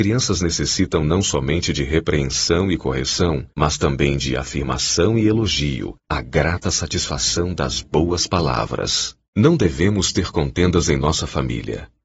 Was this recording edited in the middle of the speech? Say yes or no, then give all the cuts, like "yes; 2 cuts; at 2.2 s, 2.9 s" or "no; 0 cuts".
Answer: yes; 3 cuts; at 3.5 s, 6.0 s, 9.2 s